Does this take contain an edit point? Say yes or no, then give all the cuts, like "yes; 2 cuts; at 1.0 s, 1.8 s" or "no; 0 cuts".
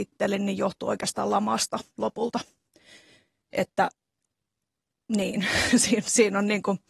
no; 0 cuts